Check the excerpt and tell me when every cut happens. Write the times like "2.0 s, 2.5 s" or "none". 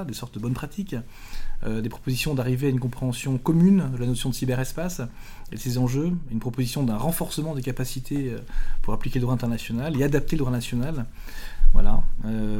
none